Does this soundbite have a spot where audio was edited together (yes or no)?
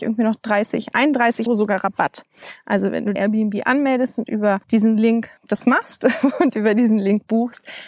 yes